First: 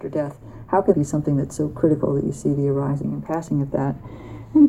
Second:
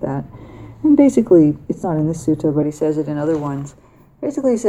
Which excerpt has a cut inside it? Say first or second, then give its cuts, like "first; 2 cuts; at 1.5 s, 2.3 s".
first; 1 cut; at 0.9 s